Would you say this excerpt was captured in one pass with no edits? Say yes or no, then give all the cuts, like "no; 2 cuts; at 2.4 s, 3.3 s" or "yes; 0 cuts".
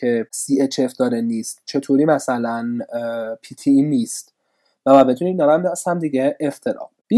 yes; 0 cuts